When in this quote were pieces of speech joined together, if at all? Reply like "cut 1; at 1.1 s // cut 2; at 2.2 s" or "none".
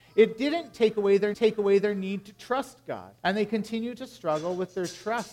cut 1; at 1.3 s // cut 2; at 3.2 s